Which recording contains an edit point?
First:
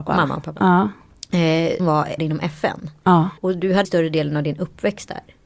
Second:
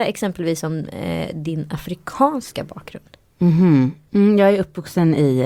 first; 4 cuts; at 1.8 s, 2.2 s, 3.4 s, 3.8 s

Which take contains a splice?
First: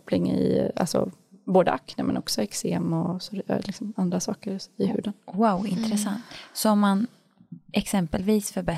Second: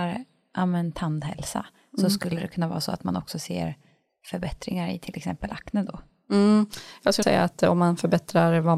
second; 1 cut; at 7.2 s

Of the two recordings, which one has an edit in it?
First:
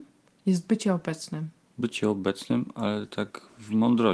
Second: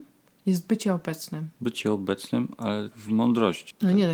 second; 2 cuts; at 1.5 s, 2.9 s

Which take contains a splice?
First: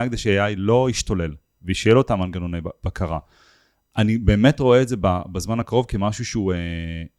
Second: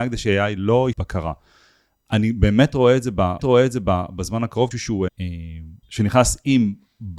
second; 5 cuts; at 0.9 s, 3.4 s, 4.7 s, 5.1 s, 5.8 s

